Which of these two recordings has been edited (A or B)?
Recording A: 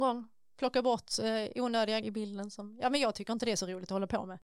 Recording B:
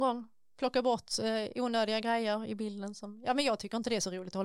A